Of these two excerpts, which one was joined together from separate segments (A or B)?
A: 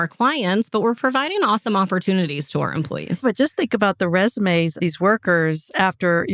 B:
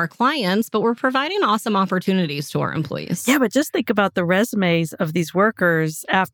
A